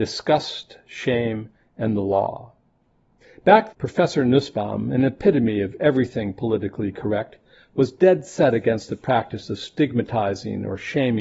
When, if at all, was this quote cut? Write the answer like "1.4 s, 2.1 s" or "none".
3.7 s